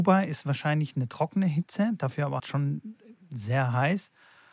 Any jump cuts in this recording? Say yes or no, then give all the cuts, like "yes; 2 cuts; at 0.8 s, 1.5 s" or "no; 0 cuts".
yes; 1 cut; at 2.4 s